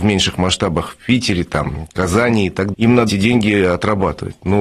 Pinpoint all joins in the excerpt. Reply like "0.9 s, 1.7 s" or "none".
2.7 s, 3.1 s